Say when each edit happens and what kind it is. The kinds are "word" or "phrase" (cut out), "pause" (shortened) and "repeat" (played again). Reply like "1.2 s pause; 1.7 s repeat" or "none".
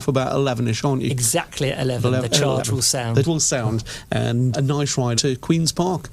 3.2 s word; 4.5 s word; 5.2 s word